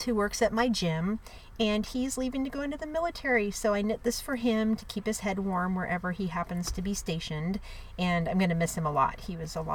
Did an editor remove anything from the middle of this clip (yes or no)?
no